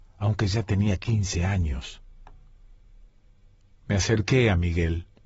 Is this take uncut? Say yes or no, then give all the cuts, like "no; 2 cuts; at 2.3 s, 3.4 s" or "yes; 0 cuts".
yes; 0 cuts